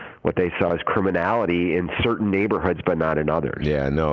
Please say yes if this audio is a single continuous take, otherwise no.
yes